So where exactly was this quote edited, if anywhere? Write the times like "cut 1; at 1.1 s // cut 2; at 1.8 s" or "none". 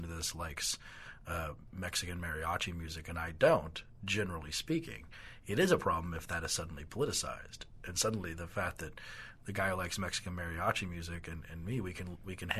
none